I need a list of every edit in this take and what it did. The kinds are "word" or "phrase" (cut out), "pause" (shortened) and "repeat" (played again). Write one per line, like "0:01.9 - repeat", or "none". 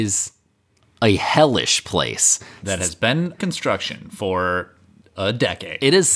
0:03.4 - word

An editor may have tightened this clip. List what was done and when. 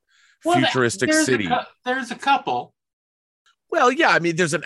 none

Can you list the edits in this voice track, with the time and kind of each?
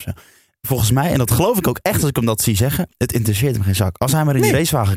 none

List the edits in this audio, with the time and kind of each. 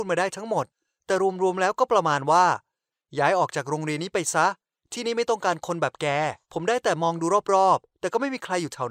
0:06.4 - pause

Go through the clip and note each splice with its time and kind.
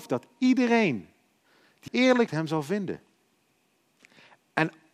0:01.9 - word
0:02.3 - word

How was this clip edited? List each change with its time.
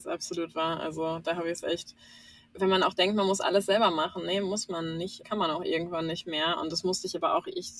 0:05.2 - word

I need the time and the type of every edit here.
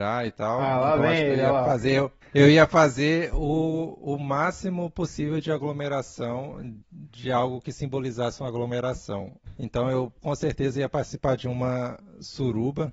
0:02.2 - pause
0:06.8 - pause
0:10.2 - pause

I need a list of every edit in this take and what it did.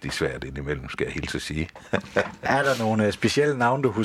none

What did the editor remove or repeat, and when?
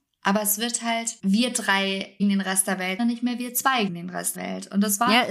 0:01.2 - word
0:02.2 - word
0:03.0 - word
0:03.9 - word
0:04.3 - word

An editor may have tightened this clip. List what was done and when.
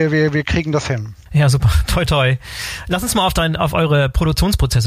0:02.1 - word

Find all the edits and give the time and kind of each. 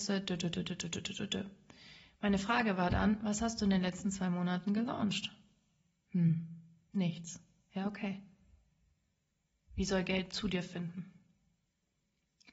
none

